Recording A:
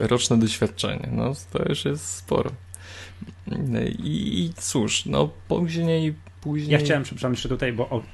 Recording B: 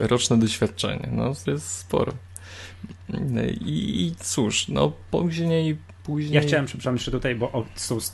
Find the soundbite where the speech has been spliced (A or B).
B